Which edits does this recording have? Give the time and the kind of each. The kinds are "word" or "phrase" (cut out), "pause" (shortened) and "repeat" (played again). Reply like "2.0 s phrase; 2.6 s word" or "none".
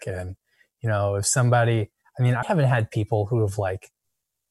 2.4 s word